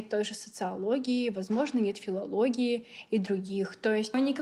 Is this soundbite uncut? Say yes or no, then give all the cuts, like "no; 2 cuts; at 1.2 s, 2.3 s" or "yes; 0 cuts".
yes; 0 cuts